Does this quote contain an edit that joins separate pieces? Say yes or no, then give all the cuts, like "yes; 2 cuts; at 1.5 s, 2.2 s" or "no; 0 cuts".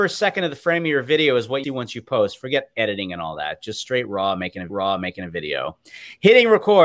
yes; 2 cuts; at 1.6 s, 4.7 s